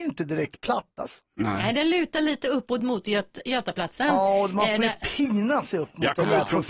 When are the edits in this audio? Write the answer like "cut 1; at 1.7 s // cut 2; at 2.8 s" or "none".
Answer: none